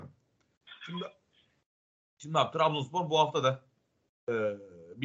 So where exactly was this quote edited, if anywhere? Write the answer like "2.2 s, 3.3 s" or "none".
none